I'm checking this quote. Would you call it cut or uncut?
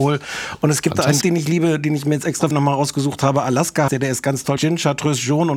cut